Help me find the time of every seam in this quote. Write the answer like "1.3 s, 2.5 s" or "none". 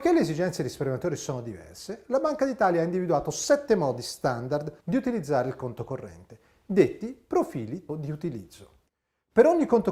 4.8 s, 7.9 s